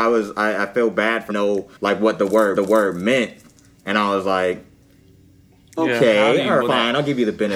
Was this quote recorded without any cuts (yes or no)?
no